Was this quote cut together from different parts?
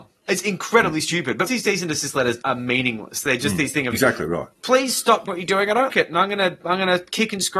yes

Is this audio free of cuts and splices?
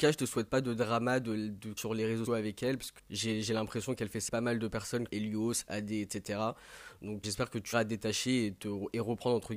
no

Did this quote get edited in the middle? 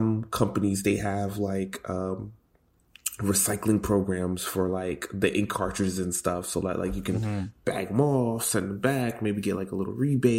no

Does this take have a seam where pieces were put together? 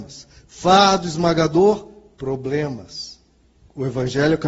no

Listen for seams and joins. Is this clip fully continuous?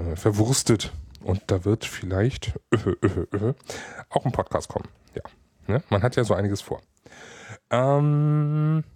yes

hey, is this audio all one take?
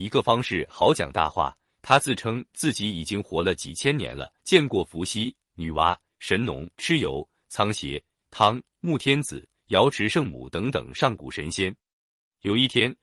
no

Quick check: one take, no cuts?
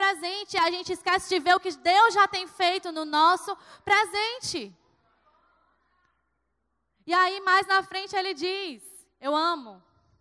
yes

